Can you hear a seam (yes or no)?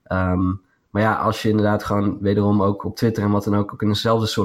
no